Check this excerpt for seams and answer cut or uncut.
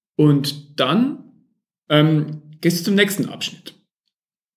uncut